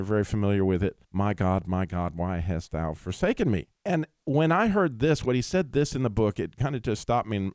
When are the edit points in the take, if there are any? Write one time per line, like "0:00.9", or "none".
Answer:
0:01.0
0:03.8